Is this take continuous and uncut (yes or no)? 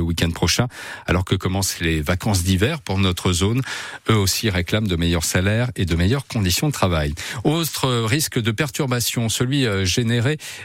yes